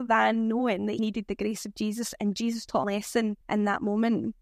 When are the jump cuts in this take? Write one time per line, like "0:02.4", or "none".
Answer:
0:01.0
0:02.8
0:03.4